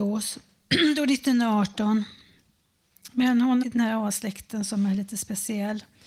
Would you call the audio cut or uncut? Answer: cut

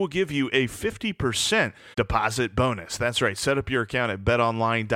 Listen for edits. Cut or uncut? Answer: cut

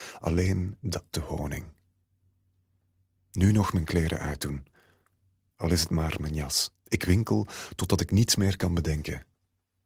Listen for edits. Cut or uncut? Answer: cut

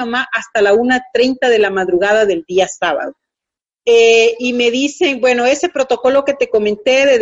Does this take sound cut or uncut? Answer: uncut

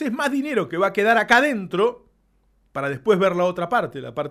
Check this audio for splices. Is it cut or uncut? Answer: uncut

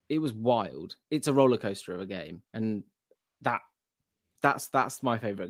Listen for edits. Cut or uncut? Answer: cut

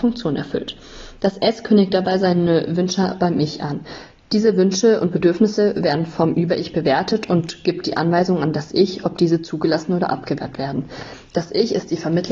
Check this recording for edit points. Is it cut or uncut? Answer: uncut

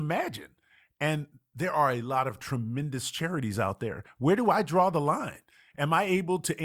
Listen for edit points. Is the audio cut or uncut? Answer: uncut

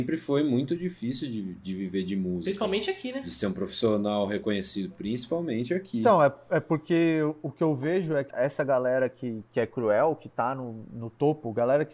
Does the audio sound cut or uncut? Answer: cut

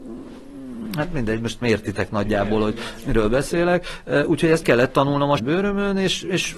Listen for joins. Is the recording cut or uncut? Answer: cut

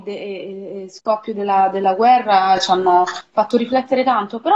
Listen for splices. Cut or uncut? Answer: uncut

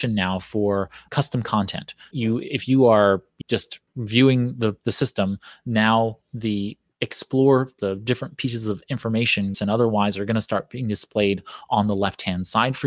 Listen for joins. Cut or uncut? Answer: cut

